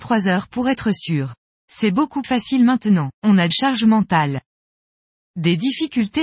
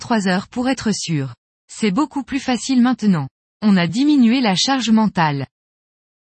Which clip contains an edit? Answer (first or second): first